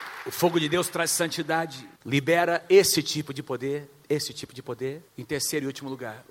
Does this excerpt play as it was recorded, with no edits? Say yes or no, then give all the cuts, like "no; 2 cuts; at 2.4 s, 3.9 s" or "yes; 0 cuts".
no; 2 cuts; at 2.0 s, 5.1 s